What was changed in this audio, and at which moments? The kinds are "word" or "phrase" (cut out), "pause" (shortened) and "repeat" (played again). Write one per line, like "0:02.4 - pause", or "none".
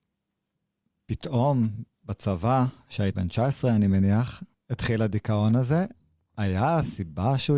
0:03.1 - word

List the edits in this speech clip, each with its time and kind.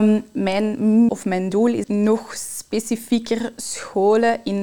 0:01.1 - word
0:01.8 - word

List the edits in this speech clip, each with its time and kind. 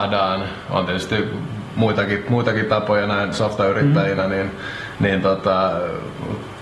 0:03.3 - word

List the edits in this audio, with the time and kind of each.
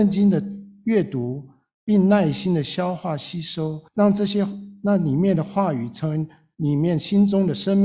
0:03.9 - pause

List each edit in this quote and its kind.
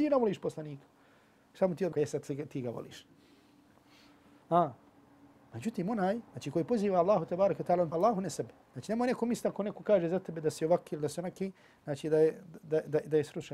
0:01.9 - word
0:06.3 - pause
0:07.9 - word
0:08.6 - pause

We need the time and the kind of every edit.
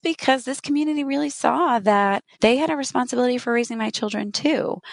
0:02.3 - pause

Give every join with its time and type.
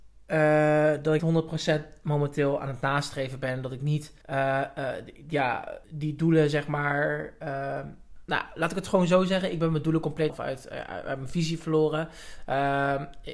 0:01.2 - word
0:04.2 - pause
0:05.8 - pause
0:10.3 - phrase

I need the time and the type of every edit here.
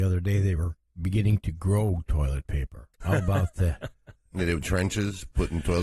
0:02.9 - pause
0:04.3 - word
0:04.6 - word

